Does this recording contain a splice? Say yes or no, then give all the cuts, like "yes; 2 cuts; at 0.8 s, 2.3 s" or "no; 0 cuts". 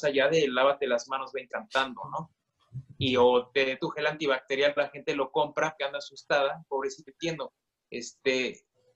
yes; 5 cuts; at 1.5 s, 3.8 s, 4.8 s, 5.8 s, 7.1 s